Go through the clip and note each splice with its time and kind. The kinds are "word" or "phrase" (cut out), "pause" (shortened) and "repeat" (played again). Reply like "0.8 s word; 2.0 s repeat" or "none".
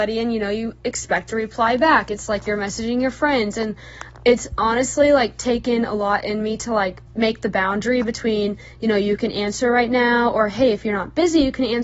7.1 s pause